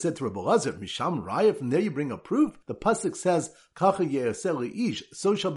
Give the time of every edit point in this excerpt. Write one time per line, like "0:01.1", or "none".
0:02.6